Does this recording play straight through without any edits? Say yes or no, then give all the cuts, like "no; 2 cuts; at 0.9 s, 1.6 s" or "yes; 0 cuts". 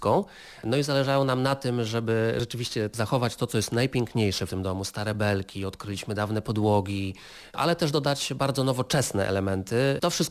yes; 0 cuts